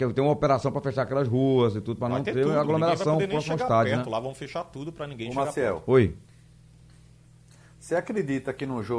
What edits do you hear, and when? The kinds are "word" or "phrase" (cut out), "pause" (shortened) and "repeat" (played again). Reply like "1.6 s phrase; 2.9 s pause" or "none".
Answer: none